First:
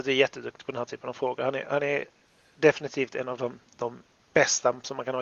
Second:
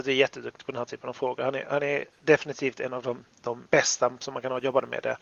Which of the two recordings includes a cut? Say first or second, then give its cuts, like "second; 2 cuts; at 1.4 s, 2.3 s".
second; 2 cuts; at 2.1 s, 3.7 s